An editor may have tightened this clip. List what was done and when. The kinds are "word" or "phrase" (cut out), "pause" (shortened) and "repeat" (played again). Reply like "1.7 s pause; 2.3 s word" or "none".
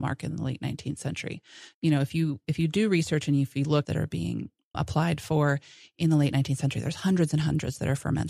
1.7 s word; 3.8 s phrase; 4.7 s word